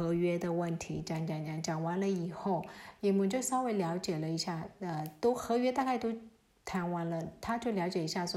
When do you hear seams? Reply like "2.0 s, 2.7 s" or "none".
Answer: none